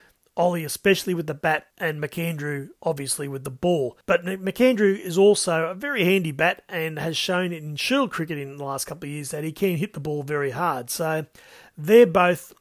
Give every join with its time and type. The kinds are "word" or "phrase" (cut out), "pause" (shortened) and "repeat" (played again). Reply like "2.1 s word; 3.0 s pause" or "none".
1.7 s pause; 2.8 s pause; 4.0 s pause